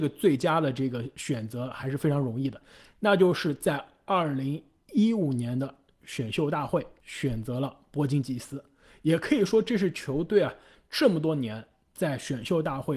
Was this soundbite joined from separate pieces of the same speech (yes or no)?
no